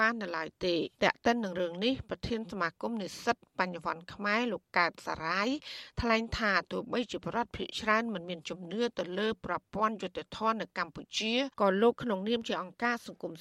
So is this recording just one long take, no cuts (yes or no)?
no